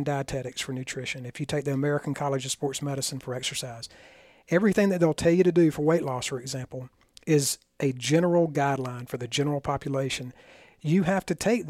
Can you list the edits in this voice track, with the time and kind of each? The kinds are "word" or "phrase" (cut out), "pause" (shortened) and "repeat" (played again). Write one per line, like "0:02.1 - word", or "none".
none